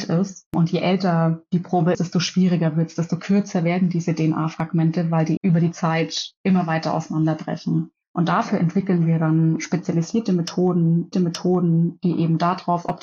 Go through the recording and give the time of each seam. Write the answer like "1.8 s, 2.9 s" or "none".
1.9 s, 5.4 s, 11.1 s